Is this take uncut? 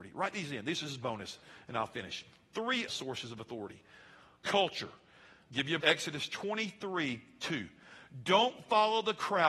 no; 2 cuts; at 2.9 s, 5.8 s

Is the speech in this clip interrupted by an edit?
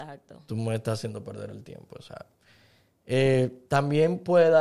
no; 0 cuts

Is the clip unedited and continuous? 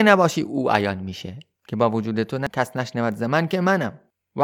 yes; 0 cuts

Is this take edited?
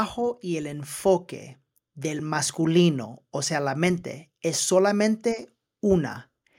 no; 0 cuts

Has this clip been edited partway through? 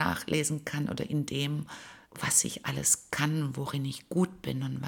yes; 1 cut; at 2.0 s

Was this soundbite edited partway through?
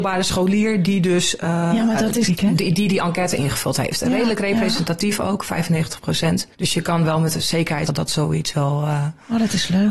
yes; 3 cuts; at 2.3 s, 6.5 s, 7.9 s

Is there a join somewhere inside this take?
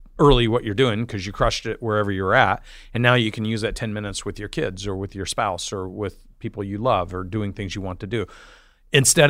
no; 0 cuts

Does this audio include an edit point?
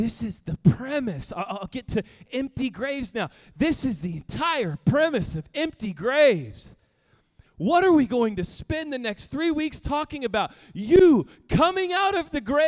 no; 0 cuts

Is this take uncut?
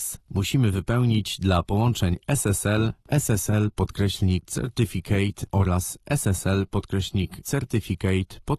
yes; 0 cuts

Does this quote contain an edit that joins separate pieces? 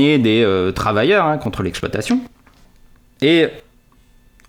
no; 0 cuts

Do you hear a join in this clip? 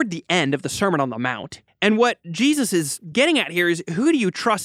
no; 0 cuts

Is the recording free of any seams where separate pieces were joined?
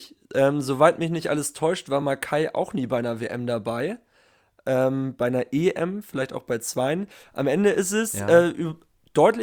yes; 0 cuts

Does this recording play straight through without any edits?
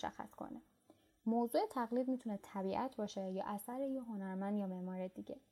yes; 0 cuts

